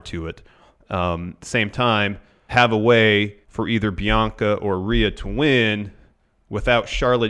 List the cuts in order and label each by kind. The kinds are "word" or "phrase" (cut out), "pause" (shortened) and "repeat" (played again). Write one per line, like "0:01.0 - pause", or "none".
0:01.4 - phrase
0:02.5 - word
0:03.4 - pause